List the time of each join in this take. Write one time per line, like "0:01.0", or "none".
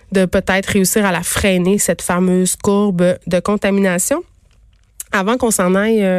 none